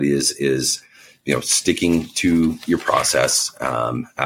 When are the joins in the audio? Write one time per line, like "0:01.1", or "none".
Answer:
none